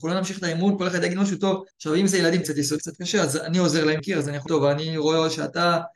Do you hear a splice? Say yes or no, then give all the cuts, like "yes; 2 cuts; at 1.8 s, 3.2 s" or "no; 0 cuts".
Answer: yes; 5 cuts; at 1.7 s, 2.4 s, 2.8 s, 4.0 s, 4.5 s